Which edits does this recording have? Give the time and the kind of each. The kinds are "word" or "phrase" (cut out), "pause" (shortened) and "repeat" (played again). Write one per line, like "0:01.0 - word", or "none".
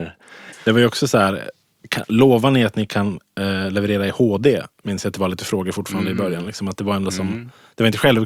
none